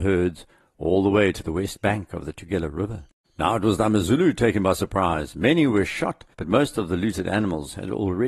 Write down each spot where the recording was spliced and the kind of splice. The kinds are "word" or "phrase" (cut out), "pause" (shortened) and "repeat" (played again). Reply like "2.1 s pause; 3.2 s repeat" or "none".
3.2 s pause; 6.3 s pause